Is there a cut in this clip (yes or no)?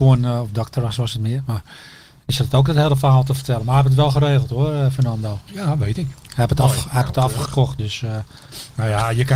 no